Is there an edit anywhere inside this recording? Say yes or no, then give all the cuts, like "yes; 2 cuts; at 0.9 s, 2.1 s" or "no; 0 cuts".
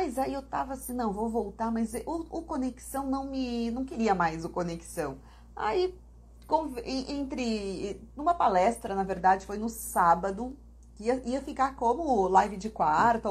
no; 0 cuts